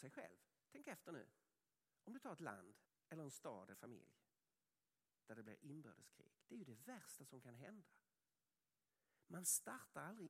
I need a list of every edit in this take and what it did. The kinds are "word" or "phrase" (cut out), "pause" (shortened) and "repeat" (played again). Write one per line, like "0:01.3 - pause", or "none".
0:01.9 - pause
0:02.9 - pause
0:03.7 - word
0:06.4 - pause